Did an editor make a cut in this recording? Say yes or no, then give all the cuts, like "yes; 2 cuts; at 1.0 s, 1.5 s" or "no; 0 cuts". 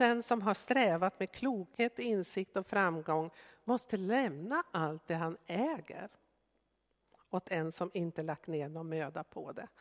no; 0 cuts